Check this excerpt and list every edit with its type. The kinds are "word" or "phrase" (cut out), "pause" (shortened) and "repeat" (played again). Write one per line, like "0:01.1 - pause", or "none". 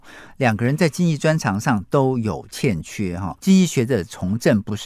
0:03.4 - pause

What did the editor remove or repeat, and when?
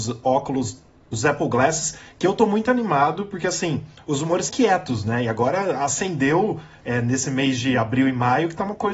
0:01.1 - word
0:04.5 - word

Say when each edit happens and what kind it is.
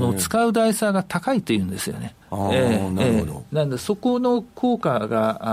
0:02.2 - pause

